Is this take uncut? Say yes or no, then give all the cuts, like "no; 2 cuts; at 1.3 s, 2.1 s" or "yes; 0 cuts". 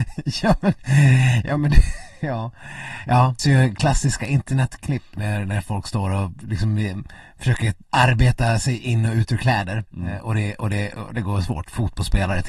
no; 3 cuts; at 3.4 s, 7.8 s, 9.9 s